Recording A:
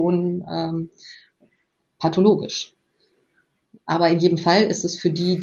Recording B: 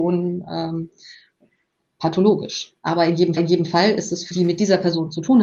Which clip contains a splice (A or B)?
B